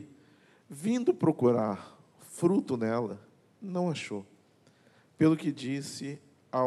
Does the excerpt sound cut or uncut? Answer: uncut